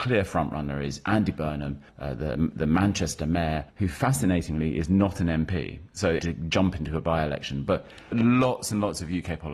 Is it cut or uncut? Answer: cut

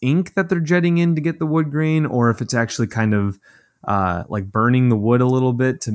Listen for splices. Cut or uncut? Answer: uncut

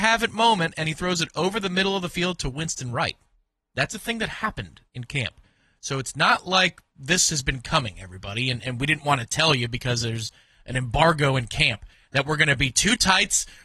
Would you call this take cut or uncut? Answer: uncut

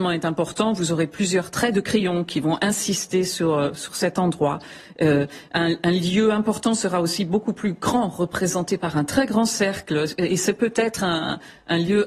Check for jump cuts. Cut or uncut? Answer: uncut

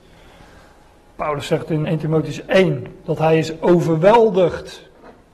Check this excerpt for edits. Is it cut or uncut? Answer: cut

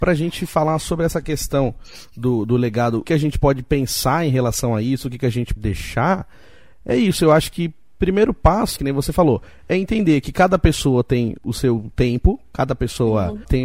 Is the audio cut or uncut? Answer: cut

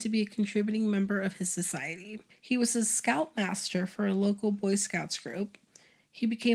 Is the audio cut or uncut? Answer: cut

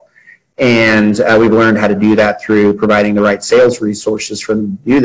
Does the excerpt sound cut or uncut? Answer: uncut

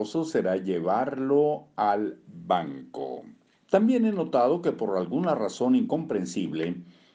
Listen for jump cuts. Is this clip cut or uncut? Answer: cut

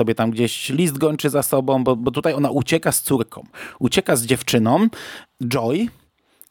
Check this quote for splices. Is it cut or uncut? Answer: uncut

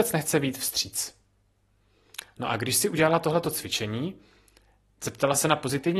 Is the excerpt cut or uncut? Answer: uncut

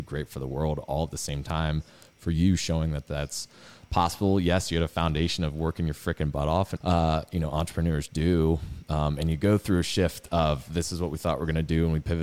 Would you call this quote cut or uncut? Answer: cut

